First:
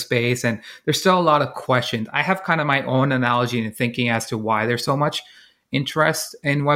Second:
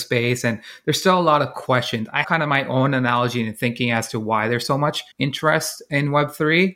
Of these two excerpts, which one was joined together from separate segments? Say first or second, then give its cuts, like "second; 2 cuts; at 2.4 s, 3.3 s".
second; 2 cuts; at 2.2 s, 5.1 s